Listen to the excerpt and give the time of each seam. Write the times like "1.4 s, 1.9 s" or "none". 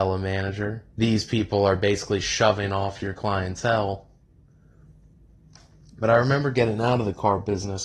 0.9 s

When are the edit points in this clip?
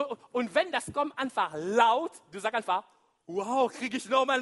none

